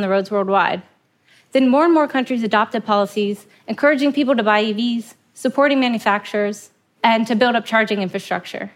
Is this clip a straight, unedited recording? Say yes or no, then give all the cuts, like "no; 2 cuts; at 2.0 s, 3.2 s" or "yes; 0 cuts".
yes; 0 cuts